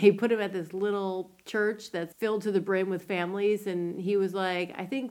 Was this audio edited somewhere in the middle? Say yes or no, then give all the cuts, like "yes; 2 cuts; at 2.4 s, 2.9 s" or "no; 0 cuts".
yes; 1 cut; at 2.1 s